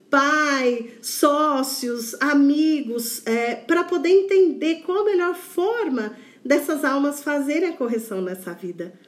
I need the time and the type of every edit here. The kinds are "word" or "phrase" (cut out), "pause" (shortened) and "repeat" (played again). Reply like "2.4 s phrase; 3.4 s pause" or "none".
none